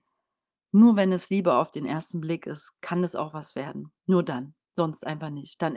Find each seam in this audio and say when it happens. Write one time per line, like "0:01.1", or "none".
0:04.0
0:04.6